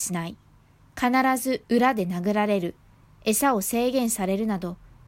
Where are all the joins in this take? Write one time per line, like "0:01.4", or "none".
none